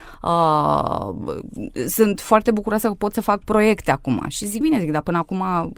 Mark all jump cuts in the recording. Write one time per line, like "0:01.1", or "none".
0:04.6